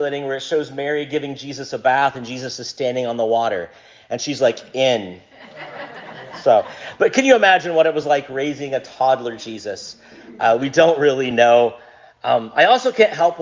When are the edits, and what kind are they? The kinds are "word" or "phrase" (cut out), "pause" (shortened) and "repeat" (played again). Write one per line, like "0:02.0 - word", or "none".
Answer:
none